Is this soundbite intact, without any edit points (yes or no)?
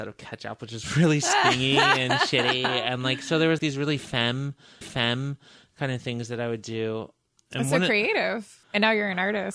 no